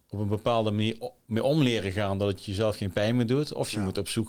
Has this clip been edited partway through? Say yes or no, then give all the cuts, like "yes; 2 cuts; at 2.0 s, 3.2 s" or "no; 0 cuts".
no; 0 cuts